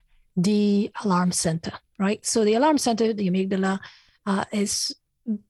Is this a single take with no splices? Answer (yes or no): yes